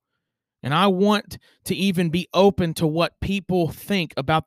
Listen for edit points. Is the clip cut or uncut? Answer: uncut